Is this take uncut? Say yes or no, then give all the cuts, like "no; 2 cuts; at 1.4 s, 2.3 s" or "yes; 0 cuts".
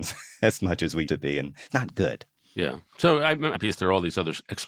no; 3 cuts; at 1.1 s, 1.7 s, 3.5 s